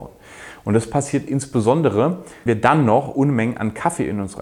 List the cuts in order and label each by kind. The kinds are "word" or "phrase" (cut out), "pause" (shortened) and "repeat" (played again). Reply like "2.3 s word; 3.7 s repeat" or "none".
2.5 s word